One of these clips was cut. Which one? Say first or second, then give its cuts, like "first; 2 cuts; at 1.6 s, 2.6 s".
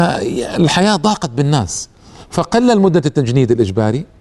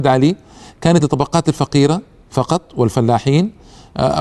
second; 1 cut; at 1.0 s